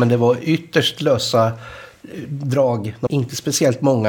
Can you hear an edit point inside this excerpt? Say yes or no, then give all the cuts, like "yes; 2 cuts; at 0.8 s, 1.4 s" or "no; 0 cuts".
yes; 1 cut; at 3.1 s